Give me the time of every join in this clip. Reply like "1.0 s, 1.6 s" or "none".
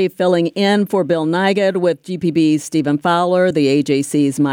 none

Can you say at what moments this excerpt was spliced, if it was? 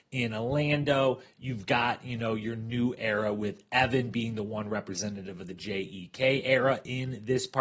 none

